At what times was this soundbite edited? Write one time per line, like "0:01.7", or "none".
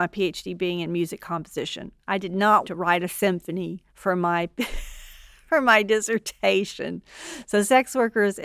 0:02.6
0:03.9